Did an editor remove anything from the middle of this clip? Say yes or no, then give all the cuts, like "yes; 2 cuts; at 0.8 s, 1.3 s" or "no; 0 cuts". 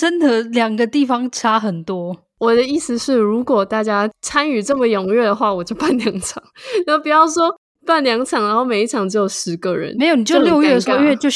no; 0 cuts